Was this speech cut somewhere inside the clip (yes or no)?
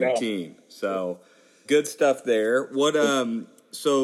yes